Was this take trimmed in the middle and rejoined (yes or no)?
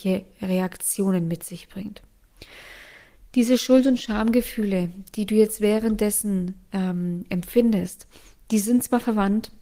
no